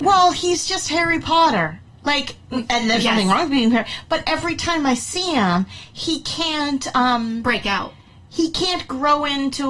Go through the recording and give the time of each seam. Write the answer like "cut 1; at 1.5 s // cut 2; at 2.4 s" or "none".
none